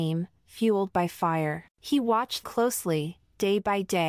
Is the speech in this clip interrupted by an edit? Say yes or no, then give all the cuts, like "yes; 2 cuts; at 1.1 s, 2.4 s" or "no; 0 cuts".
yes; 2 cuts; at 1.7 s, 2.4 s